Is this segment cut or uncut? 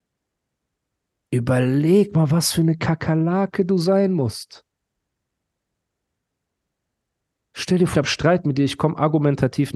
cut